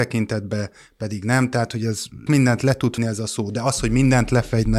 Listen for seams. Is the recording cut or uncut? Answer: cut